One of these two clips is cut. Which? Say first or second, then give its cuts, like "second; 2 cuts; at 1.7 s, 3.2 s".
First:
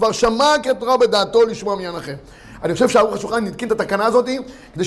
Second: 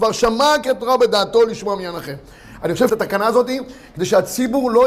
second; 1 cut; at 2.9 s